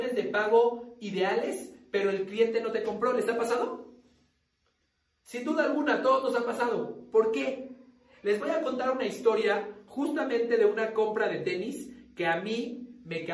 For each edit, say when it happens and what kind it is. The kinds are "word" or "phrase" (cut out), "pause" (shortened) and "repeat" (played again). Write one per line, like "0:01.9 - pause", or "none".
none

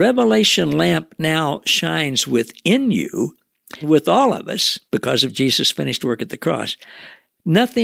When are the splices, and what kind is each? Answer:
0:03.8 - word
0:04.9 - pause

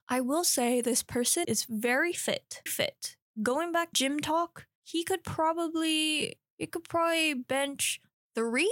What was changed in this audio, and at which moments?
0:01.4 - word
0:02.7 - word
0:03.9 - word

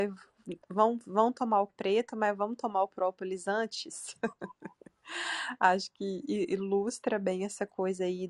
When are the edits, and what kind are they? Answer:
0:01.7 - word

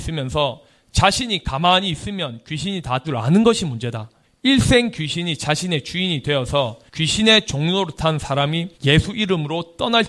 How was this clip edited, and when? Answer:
0:03.0 - word
0:04.2 - pause
0:06.9 - pause
0:08.7 - pause

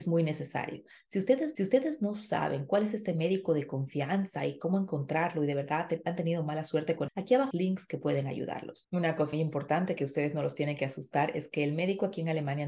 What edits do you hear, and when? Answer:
0:01.5 - repeat
0:07.1 - word
0:07.5 - phrase
0:09.3 - word

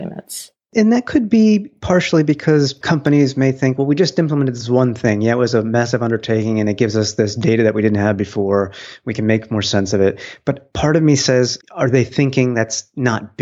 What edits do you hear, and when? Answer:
0:11.6 - pause

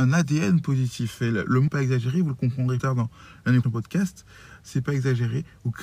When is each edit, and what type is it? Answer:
0:01.7 - word
0:02.8 - word
0:03.6 - word

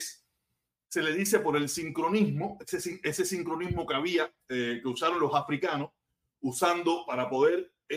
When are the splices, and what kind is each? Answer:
none

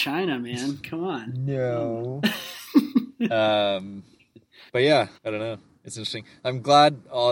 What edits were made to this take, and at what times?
0:04.7 - pause
0:05.2 - pause

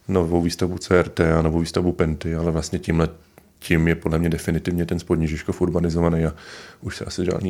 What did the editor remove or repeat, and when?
none

